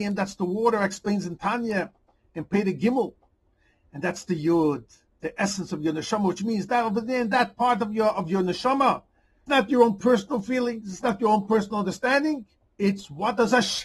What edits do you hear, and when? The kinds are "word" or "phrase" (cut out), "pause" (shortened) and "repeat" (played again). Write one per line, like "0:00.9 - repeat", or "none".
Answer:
0:09.5 - word